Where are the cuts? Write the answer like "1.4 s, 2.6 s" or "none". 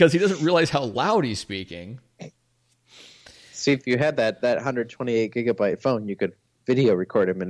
none

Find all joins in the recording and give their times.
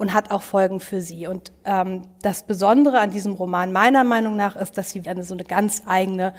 5.0 s

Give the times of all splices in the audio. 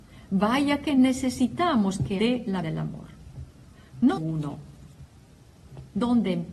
2.2 s, 2.6 s, 4.2 s

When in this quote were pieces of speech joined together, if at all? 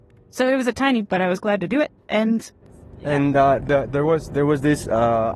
1.0 s, 2.0 s

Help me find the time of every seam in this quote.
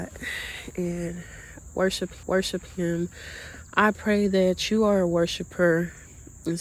2.2 s

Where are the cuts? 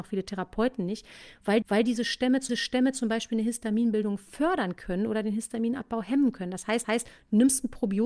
1.6 s, 2.5 s, 6.8 s

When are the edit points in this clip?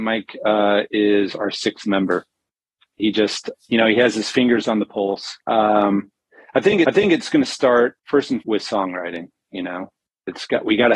3.0 s, 3.5 s, 5.4 s, 6.8 s, 8.0 s, 8.4 s

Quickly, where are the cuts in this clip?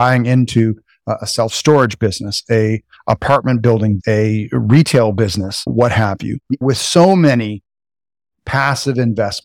4.0 s, 6.6 s

